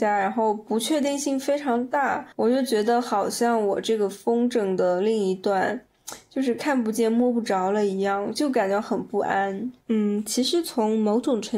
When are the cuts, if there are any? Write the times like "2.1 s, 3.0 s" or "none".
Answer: 2.3 s, 9.8 s